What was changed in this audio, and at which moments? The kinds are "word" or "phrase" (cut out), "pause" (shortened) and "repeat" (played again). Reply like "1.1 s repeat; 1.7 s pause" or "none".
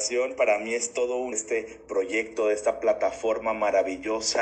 1.3 s phrase